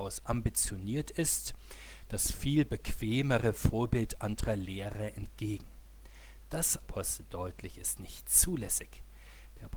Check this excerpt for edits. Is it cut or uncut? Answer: cut